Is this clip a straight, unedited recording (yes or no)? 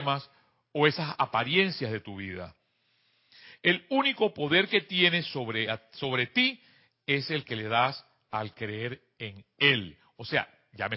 yes